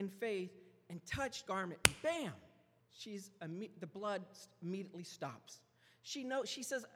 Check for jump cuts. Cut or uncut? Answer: cut